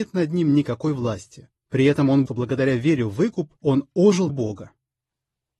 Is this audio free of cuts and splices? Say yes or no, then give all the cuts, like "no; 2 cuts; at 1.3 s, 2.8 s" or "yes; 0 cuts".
no; 4 cuts; at 1.6 s, 2.3 s, 3.6 s, 4.3 s